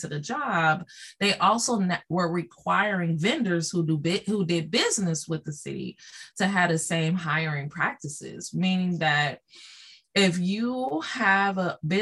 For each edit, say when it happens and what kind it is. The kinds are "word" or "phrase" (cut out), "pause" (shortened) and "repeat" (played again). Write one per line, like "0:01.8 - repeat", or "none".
none